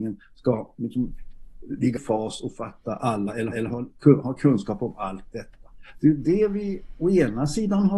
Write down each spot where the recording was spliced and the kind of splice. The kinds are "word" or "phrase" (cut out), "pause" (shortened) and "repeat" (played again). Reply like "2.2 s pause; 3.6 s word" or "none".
2.0 s word; 3.5 s repeat